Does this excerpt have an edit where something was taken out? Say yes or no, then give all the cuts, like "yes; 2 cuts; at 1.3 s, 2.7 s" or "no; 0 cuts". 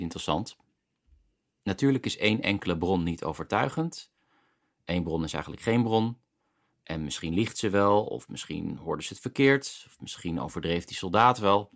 no; 0 cuts